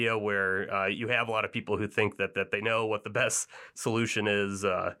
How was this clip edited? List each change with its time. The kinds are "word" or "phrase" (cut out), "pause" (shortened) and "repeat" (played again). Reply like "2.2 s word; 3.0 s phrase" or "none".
2.3 s repeat